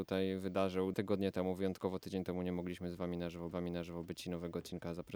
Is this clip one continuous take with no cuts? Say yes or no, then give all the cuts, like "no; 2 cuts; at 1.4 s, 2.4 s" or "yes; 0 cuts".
no; 2 cuts; at 0.9 s, 3.5 s